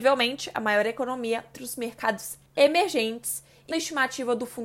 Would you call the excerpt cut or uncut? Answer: cut